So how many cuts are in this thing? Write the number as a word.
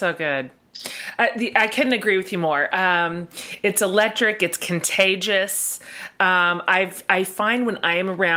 zero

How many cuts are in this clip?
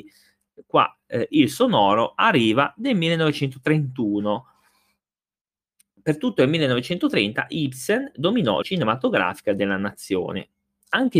one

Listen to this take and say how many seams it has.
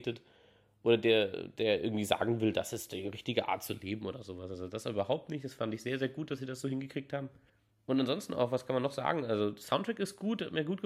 one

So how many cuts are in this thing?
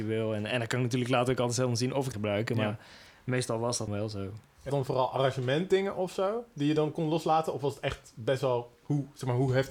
three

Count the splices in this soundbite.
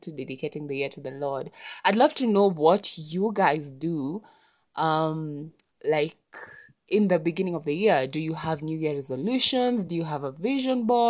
zero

